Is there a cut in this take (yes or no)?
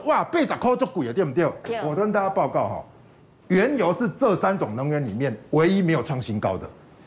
no